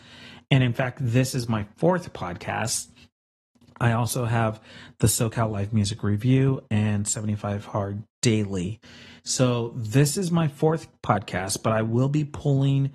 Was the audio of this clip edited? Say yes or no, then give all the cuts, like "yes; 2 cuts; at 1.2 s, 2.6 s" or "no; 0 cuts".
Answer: no; 0 cuts